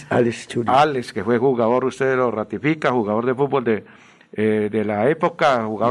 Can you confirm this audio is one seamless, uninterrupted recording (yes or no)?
yes